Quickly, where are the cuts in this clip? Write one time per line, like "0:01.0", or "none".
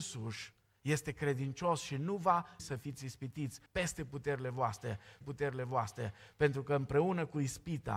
0:02.6
0:03.7
0:05.2

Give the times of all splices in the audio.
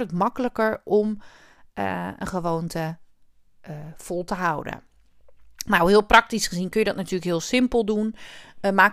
none

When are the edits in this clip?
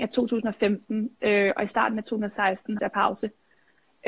0:02.8

